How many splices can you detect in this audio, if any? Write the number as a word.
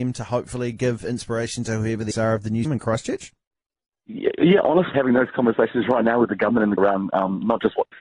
four